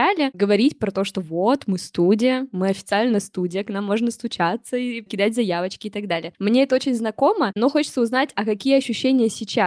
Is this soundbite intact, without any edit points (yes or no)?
yes